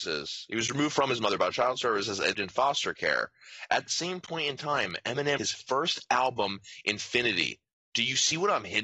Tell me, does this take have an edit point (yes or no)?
yes